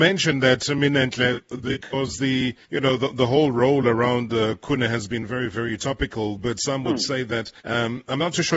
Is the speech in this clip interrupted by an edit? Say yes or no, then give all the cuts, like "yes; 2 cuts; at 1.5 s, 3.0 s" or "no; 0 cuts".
yes; 2 cuts; at 2.6 s, 7.6 s